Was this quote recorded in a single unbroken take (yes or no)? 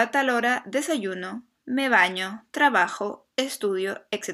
yes